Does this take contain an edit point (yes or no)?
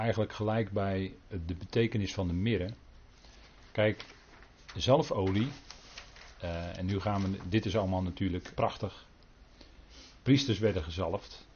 yes